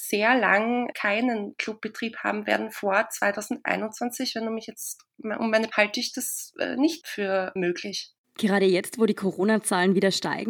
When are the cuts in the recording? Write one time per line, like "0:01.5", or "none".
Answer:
0:05.7